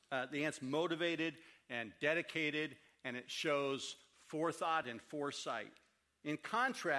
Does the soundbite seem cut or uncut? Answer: uncut